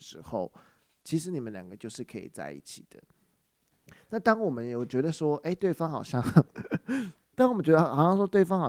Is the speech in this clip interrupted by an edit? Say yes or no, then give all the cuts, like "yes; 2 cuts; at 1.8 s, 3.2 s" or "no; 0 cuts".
no; 0 cuts